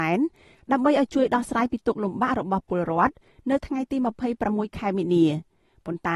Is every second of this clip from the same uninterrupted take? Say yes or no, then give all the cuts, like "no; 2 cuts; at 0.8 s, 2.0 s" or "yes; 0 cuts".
yes; 0 cuts